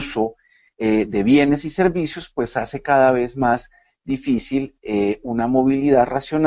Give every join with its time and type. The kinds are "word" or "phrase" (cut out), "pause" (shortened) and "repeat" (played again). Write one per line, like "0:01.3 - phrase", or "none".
none